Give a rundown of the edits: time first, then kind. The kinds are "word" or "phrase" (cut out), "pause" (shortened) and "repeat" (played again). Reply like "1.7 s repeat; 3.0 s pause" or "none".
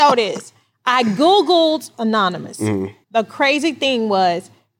1.9 s word; 3.0 s pause

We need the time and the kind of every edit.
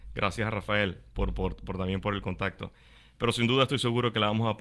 none

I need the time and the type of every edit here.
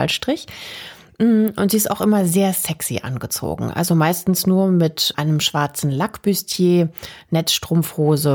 5.1 s word

